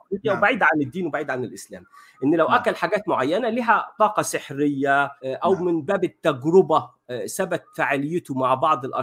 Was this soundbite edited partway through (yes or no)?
yes